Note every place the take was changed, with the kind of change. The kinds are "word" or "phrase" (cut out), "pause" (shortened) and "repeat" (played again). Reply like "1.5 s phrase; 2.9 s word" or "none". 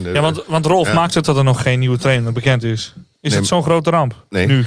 1.2 s word; 3.1 s pause